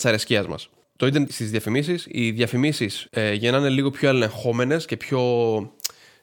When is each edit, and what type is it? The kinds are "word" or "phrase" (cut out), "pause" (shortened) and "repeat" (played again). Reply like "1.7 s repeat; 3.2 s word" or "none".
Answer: 1.3 s word; 3.1 s pause